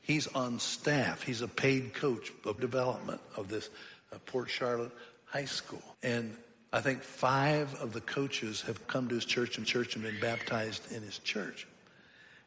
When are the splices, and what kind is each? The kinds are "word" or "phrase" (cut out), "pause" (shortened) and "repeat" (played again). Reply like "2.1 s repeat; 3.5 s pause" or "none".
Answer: 2.6 s word; 5.9 s pause; 8.8 s word; 9.6 s repeat